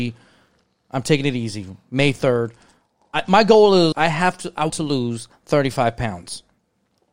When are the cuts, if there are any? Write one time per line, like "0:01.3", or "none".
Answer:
0:03.9
0:04.7